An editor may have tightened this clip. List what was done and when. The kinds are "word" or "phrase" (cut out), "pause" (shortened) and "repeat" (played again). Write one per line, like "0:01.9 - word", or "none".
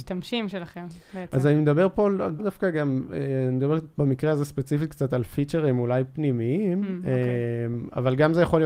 0:02.4 - word